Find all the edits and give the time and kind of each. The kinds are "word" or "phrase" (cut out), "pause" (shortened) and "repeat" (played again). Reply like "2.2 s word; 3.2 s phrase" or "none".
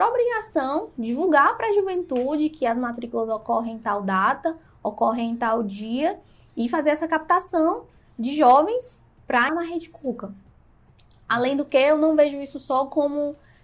9.5 s word